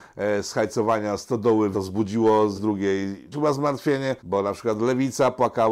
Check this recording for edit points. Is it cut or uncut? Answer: cut